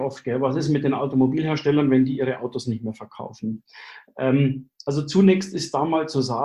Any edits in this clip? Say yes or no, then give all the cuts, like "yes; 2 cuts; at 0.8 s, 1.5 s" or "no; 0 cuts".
no; 0 cuts